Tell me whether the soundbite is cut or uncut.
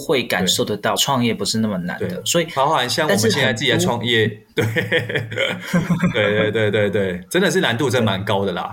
cut